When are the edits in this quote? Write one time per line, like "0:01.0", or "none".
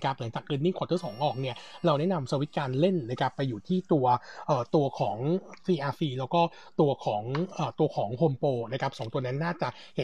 none